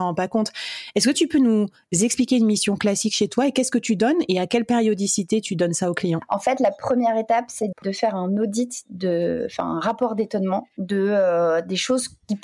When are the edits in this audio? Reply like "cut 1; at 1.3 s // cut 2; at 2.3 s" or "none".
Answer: cut 1; at 7.7 s